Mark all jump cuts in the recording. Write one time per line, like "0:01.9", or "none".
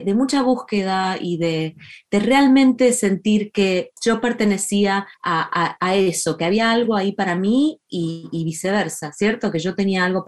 0:04.0
0:05.1